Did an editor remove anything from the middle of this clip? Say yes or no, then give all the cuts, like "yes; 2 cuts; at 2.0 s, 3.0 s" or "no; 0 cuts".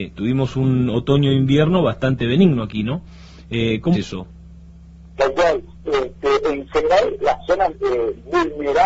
yes; 3 cuts; at 3.9 s, 7.2 s, 7.7 s